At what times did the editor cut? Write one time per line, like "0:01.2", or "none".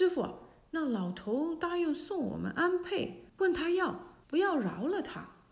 0:03.3
0:04.2

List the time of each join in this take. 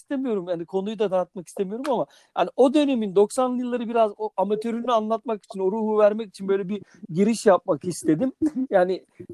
none

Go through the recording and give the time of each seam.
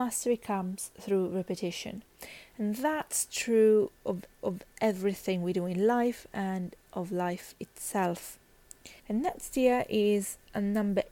0:04.4
0:09.0

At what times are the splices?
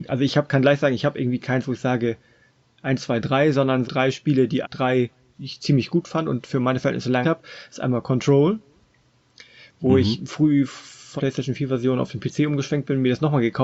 0:03.8
0:04.6
0:05.3
0:07.2
0:10.3
0:11.2

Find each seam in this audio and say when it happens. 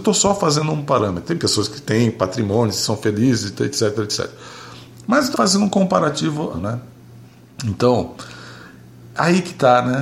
0:05.3
0:06.5

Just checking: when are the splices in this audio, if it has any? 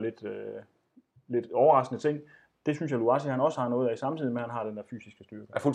none

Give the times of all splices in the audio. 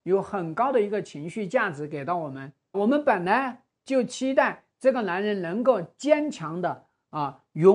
0:02.7

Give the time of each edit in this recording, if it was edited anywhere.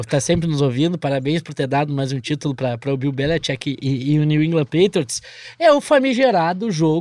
none

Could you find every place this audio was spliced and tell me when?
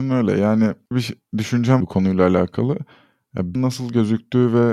0:00.9
0:01.8
0:03.6

